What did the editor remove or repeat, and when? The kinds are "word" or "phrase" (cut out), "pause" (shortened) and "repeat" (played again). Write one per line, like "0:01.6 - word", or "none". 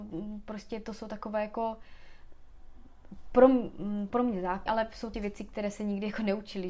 0:04.1 - word
0:04.7 - word
0:05.1 - word